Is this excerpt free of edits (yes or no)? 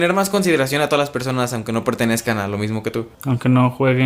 yes